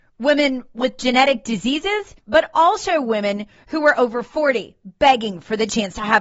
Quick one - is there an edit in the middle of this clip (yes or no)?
yes